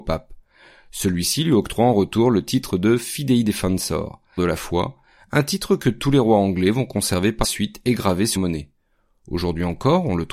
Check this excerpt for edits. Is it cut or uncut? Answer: cut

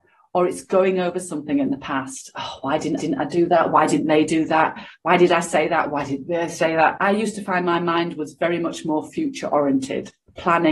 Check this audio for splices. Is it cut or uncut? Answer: cut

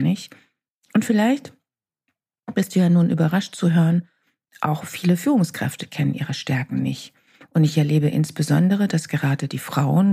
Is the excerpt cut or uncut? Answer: uncut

